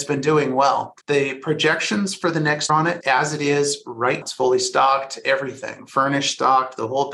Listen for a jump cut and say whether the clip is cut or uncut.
cut